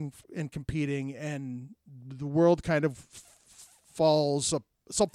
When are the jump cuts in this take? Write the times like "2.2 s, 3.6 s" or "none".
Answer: none